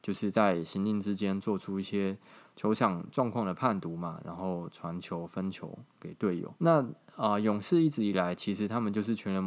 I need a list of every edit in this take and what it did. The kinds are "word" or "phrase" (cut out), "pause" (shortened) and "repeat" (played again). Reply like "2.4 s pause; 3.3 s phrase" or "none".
6.6 s pause